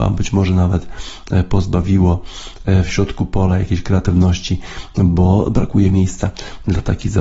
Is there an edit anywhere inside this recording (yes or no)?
no